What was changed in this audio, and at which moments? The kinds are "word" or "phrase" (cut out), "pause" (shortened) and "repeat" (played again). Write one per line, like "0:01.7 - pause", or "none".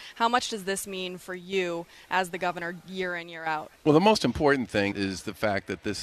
0:03.7 - pause
0:04.9 - word

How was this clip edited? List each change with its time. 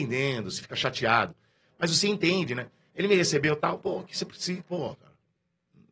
none

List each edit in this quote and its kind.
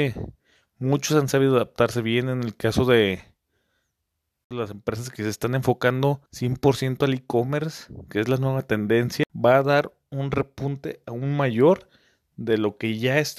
0:06.3 - pause

